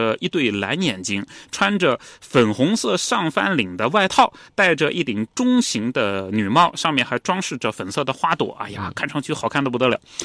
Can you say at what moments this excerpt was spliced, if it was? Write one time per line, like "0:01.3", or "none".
none